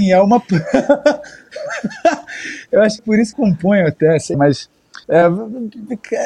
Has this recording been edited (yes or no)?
yes